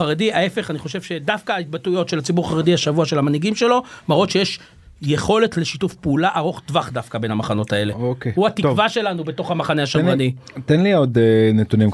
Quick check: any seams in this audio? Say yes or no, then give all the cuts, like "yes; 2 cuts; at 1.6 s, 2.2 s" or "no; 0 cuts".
no; 0 cuts